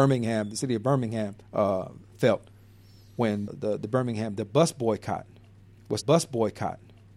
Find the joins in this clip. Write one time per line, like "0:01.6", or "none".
0:01.4
0:03.5
0:06.0